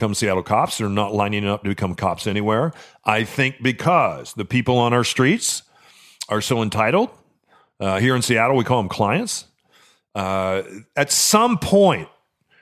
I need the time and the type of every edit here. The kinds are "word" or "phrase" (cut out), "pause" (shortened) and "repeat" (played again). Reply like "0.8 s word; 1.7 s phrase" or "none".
none